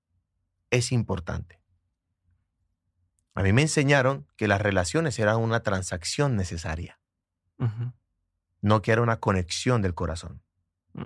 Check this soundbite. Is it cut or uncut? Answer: uncut